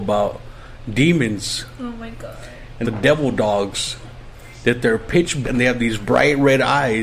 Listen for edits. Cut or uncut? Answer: cut